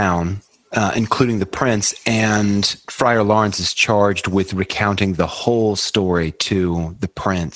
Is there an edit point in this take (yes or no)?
no